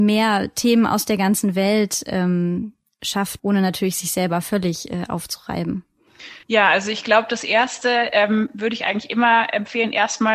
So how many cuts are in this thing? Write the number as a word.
two